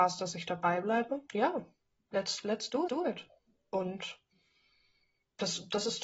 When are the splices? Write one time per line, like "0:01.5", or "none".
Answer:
0:01.3
0:02.9